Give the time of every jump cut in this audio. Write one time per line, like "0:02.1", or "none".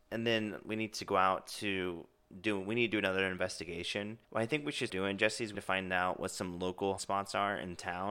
0:04.2
0:04.9
0:05.5
0:07.0